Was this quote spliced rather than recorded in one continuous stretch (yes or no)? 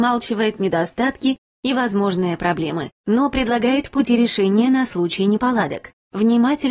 no